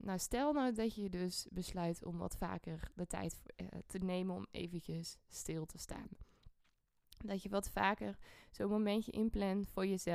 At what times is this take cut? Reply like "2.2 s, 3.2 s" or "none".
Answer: none